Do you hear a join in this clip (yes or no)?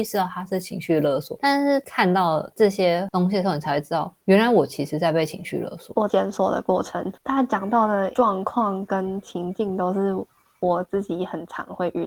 no